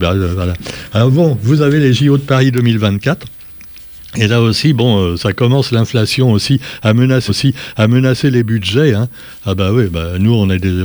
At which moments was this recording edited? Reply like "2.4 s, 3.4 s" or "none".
7.3 s